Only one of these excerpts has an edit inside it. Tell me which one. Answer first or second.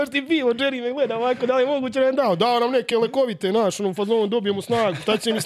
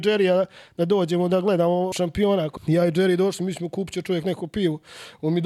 second